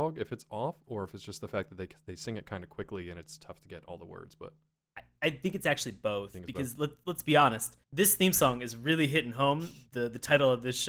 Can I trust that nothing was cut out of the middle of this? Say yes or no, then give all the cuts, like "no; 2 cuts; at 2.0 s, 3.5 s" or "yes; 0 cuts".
no; 1 cut; at 7.8 s